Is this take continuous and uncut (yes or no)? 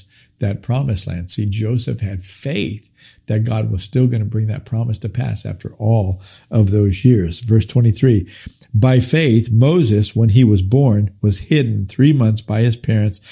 yes